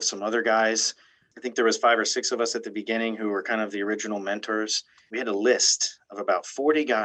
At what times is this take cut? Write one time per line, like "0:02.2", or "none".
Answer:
none